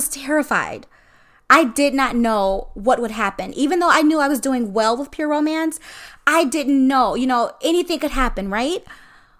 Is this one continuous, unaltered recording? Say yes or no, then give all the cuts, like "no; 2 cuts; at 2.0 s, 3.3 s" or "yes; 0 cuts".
yes; 0 cuts